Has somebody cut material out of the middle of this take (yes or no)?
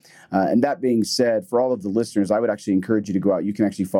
no